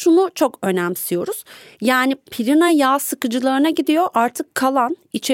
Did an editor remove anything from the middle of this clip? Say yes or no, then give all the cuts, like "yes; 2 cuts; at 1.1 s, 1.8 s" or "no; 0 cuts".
no; 0 cuts